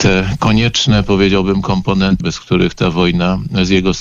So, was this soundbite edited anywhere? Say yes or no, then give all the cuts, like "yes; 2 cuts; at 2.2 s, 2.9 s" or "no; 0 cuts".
yes; 1 cut; at 2.2 s